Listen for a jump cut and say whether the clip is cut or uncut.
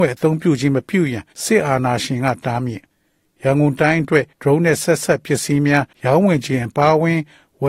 cut